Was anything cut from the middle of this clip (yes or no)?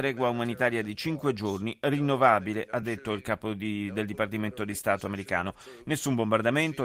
no